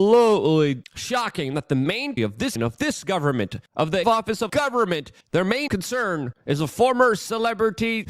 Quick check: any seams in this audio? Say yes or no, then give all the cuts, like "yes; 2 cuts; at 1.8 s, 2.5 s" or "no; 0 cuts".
yes; 7 cuts; at 2.2 s, 2.6 s, 3.7 s, 4.0 s, 4.5 s, 5.2 s, 5.7 s